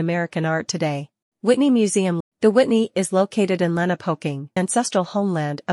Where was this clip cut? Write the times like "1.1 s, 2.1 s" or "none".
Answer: 1.2 s, 2.2 s, 4.6 s